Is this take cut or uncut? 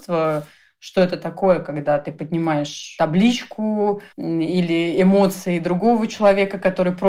cut